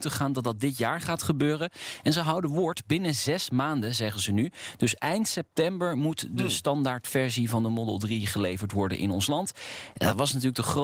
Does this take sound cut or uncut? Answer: uncut